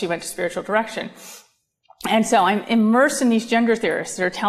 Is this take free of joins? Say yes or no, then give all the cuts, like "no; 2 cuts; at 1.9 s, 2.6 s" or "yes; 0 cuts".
yes; 0 cuts